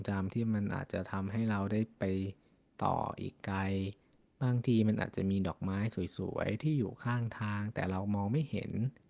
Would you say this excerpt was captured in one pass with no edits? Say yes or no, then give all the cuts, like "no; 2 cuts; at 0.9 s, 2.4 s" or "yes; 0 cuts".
yes; 0 cuts